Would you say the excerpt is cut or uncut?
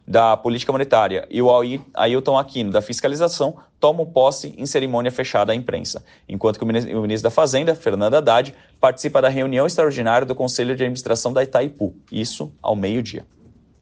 uncut